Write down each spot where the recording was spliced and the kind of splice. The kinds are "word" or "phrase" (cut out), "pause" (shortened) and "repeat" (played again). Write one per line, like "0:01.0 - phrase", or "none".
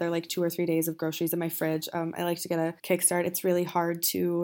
0:02.8 - pause

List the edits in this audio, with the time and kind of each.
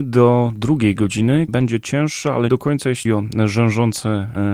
0:01.5 - word
0:02.5 - word
0:03.0 - word

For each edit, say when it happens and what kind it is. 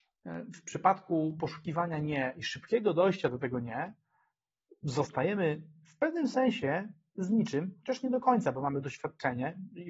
none

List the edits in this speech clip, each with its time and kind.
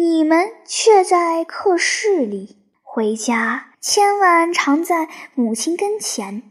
0:02.7 - pause
0:03.7 - pause

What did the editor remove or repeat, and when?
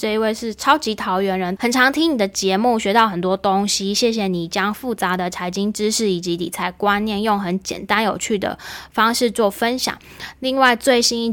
0:01.6 - phrase

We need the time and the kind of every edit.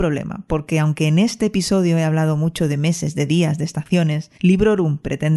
0:04.3 - pause

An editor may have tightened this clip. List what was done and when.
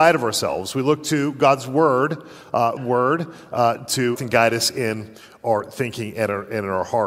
0:02.8 - phrase
0:04.1 - word

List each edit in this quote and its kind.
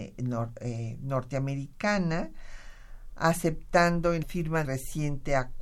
0:04.2 - word
0:04.6 - word

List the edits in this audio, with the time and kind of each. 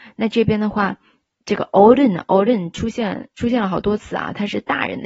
0:01.2 - phrase

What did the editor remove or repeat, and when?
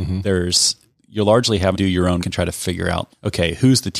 0:01.7 - word
0:02.2 - word
0:03.1 - word

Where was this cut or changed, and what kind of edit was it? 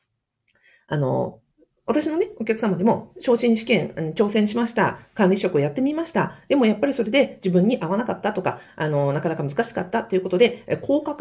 none

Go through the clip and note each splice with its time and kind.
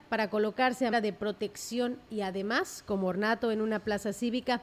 0:00.9 - word

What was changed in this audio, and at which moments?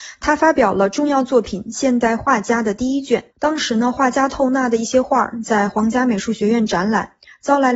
0:03.3 - pause

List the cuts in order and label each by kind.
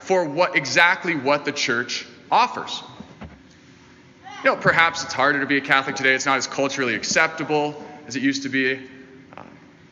none

